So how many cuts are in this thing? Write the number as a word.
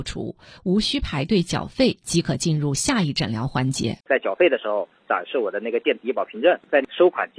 one